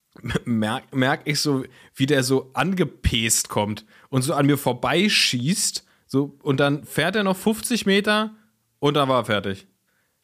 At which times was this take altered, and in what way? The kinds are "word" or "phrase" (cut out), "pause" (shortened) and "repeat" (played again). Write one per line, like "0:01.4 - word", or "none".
none